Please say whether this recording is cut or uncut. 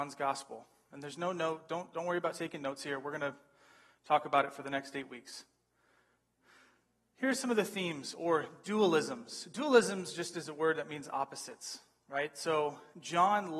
uncut